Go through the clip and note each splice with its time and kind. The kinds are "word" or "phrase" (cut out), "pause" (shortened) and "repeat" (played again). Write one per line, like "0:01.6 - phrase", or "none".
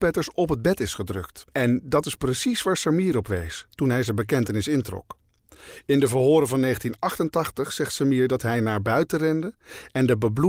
0:01.5 - pause